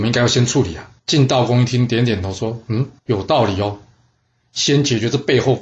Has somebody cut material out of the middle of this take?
yes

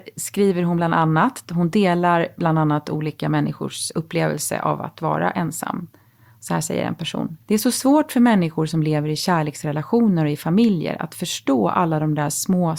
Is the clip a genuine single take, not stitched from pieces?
no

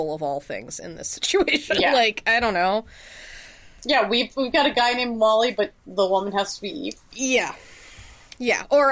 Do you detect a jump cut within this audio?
no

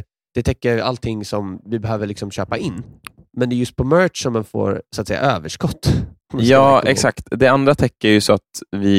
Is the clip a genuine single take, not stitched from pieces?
yes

